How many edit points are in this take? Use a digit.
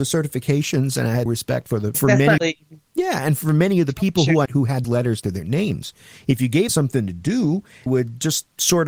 8